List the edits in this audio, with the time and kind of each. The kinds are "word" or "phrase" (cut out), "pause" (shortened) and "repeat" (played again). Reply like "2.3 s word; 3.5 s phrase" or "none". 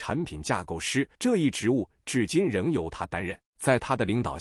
1.1 s pause; 3.5 s pause